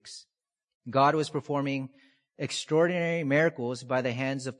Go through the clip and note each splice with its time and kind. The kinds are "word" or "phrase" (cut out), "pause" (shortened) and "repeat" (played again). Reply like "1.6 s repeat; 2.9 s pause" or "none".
none